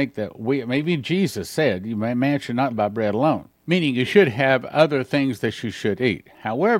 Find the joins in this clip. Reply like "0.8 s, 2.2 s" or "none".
2.7 s, 3.5 s